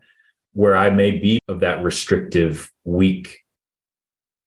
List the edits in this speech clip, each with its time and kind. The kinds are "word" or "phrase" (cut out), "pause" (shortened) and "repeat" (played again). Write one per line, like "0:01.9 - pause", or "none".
0:01.4 - word